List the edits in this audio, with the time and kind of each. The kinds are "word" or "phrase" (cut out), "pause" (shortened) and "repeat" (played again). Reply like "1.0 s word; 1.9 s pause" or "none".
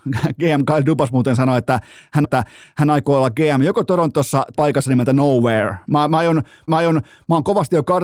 2.2 s repeat; 4.5 s word; 6.7 s repeat